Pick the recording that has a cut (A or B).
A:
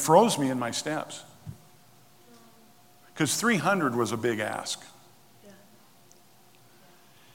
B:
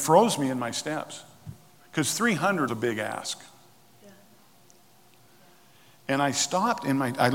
B